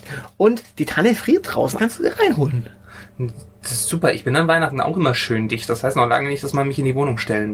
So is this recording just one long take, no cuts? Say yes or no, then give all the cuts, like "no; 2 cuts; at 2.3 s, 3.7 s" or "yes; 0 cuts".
no; 1 cut; at 1.8 s